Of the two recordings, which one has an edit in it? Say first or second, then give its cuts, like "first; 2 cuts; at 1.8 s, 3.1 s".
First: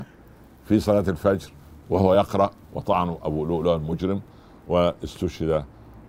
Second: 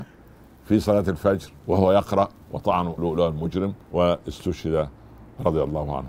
second; 3 cuts; at 1.6 s, 3.0 s, 3.8 s